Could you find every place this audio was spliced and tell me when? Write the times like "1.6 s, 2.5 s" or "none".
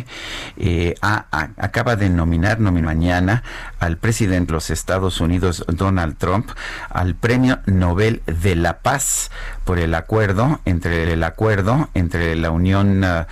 2.8 s, 4.5 s, 11.0 s